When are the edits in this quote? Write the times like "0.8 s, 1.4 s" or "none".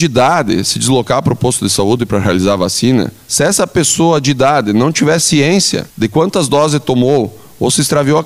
5.9 s